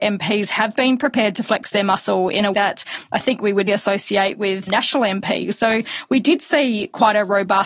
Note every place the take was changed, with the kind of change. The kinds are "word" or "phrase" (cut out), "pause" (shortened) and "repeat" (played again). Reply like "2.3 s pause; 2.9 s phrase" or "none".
2.5 s word; 3.7 s word; 4.7 s word